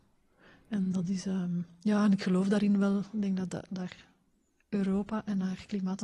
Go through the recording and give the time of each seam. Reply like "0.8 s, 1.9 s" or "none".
none